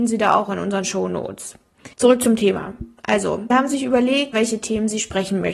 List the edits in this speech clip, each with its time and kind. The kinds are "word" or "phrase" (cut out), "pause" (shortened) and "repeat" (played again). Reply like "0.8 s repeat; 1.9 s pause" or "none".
1.9 s pause; 3.5 s word; 4.3 s word